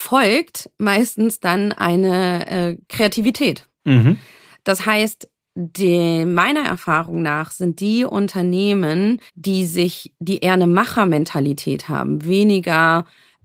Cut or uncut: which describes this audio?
cut